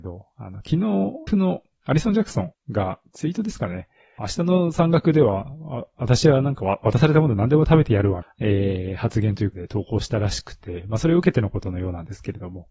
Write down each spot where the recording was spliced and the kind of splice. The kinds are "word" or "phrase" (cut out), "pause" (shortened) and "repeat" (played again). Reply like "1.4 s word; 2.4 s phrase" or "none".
1.3 s phrase; 2.5 s pause; 4.2 s phrase; 8.2 s phrase; 9.5 s word